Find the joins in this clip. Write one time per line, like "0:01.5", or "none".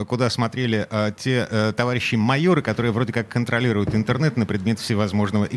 none